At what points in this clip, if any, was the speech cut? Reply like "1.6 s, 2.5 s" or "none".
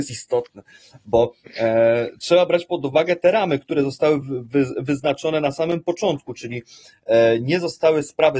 none